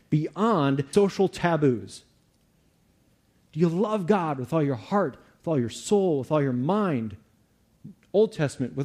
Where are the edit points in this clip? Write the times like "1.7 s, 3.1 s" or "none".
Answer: 0.9 s